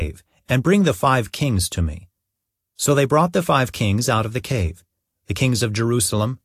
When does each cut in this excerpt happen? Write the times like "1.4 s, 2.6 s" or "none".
none

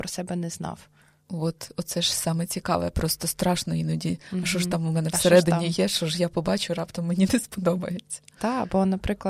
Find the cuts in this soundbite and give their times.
none

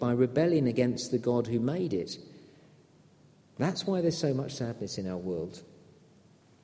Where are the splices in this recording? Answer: none

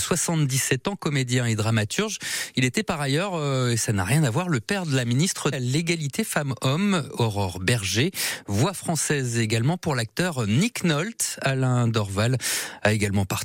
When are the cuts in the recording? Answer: 5.5 s

